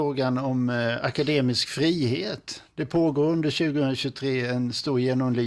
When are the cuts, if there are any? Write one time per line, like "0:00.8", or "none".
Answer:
none